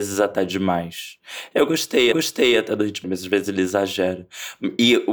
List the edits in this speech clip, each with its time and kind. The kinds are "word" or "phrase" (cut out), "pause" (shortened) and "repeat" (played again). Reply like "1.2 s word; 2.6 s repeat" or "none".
2.1 s repeat; 3.0 s word